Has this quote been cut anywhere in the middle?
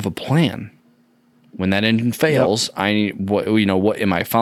no; 0 cuts

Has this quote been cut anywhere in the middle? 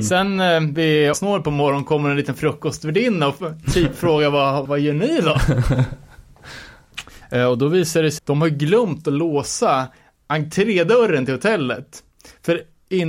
yes; 3 cuts; at 1.1 s, 4.7 s, 8.2 s

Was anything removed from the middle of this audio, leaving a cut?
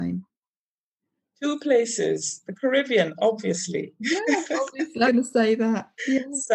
yes; 1 cut; at 5.1 s

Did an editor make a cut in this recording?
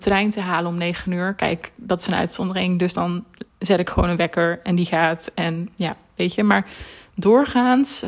yes; 1 cut; at 3.5 s

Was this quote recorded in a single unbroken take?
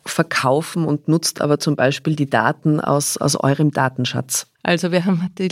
no; 1 cut; at 4.5 s

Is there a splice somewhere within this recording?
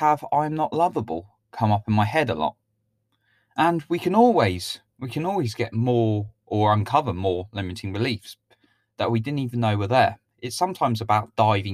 no; 0 cuts

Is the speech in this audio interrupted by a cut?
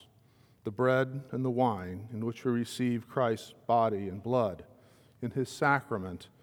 no; 0 cuts

